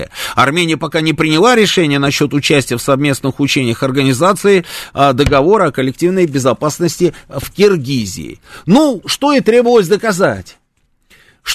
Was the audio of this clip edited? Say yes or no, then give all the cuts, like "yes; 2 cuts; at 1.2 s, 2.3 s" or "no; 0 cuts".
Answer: yes; 1 cut; at 9.0 s